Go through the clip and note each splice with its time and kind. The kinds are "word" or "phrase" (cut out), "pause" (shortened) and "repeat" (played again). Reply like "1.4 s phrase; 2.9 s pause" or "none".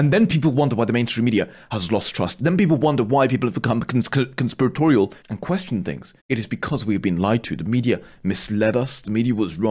5.2 s pause; 6.2 s pause